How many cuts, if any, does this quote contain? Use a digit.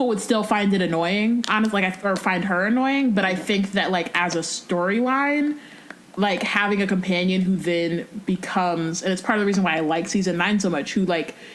0